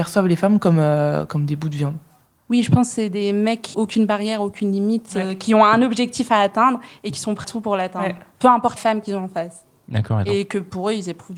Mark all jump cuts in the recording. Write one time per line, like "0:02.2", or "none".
0:03.7
0:07.4
0:08.8